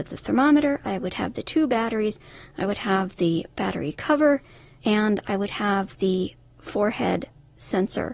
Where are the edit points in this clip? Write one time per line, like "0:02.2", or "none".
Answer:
none